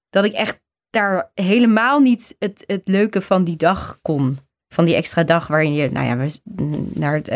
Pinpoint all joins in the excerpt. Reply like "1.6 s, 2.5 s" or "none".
none

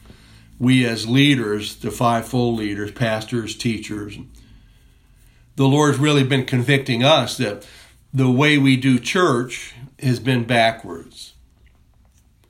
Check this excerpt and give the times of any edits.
9.9 s

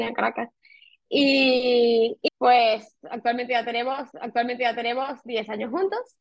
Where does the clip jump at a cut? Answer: 2.3 s, 4.1 s

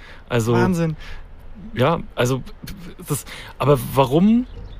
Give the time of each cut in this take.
none

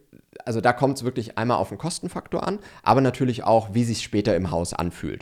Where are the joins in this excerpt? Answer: none

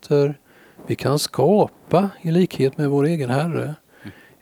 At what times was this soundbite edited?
none

